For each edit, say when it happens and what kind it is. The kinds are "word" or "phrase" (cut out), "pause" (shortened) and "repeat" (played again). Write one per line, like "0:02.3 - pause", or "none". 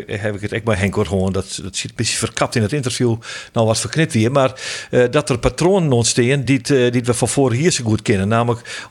none